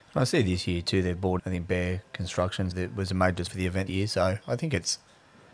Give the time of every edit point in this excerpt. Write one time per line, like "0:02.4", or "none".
0:01.4
0:02.7
0:03.5
0:03.9